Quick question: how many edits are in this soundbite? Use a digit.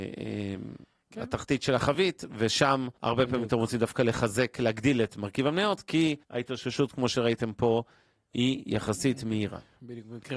2